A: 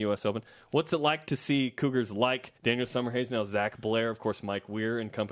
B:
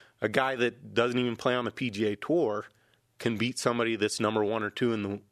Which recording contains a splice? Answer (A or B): A